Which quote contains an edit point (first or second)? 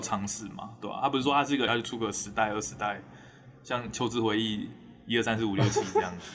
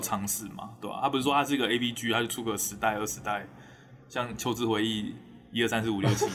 first